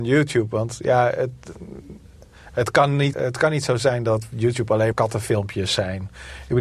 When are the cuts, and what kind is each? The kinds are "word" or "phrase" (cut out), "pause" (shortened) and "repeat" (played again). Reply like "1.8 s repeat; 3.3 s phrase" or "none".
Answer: 3.1 s word; 4.9 s word